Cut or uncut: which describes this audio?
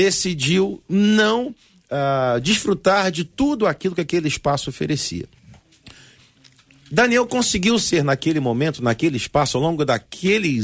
uncut